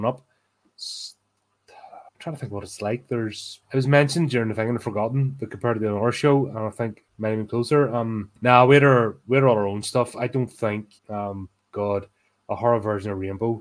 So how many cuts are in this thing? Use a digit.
5